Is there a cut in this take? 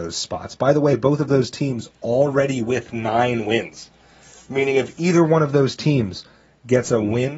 no; 0 cuts

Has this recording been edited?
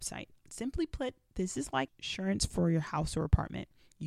yes; 1 cut; at 1.9 s

